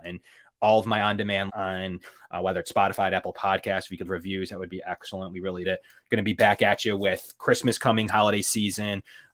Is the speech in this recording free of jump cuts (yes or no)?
no